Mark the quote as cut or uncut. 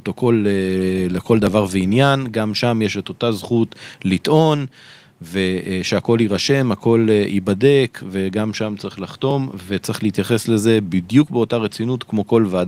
uncut